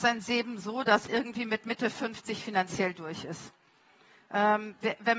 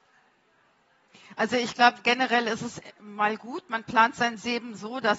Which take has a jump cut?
first; 1 cut; at 1.1 s

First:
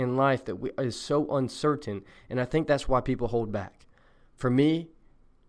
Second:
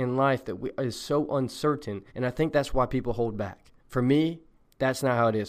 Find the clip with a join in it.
second; 3 cuts; at 2.1 s, 3.8 s, 4.6 s

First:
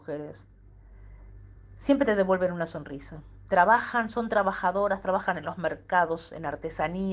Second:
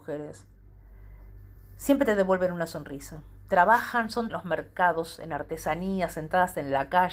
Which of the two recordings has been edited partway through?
second; 1 cut; at 4.3 s

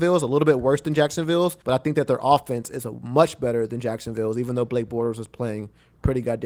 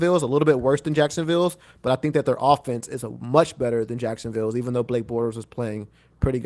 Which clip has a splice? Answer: first; 1 cut; at 1.6 s

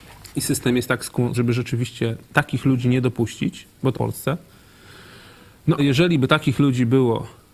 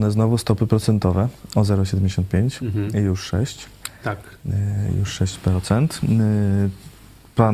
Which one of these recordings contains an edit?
first; 4 cuts; at 1.3 s, 2.2 s, 3.9 s, 5.8 s

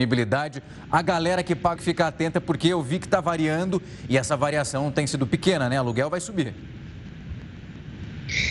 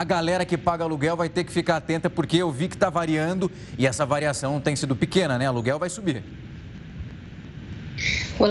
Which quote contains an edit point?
first; 1 cut; at 1.8 s

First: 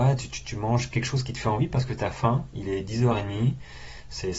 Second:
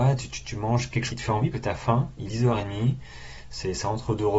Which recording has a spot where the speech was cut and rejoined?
second; 3 cuts; at 1.1 s, 1.5 s, 2.3 s

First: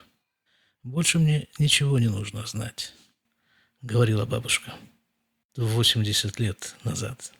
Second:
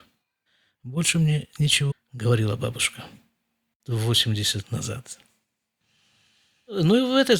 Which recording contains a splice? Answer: second; 2 cuts; at 1.9 s, 4.6 s

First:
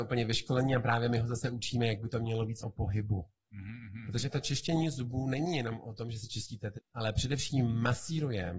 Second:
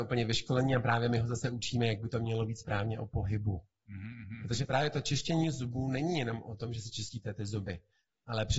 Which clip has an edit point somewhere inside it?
first; 3 cuts; at 2.6 s, 4.3 s, 6.8 s

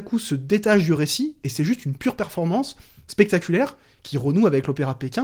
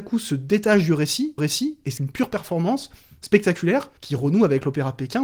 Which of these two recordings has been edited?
second; 3 cuts; at 1.4 s, 2.0 s, 4.0 s

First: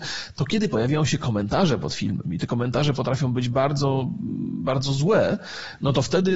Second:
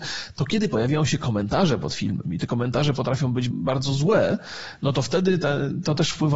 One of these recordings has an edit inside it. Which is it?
second; 1 cut; at 3.5 s

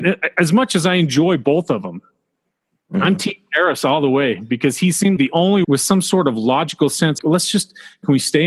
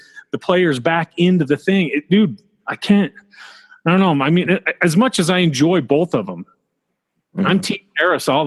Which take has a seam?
first; 3 cuts; at 5.2 s, 5.6 s, 7.2 s

